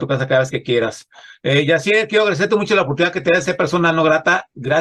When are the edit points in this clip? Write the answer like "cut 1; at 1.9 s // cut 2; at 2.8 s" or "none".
none